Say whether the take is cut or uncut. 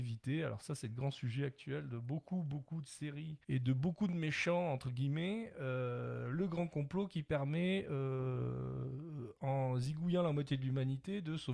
cut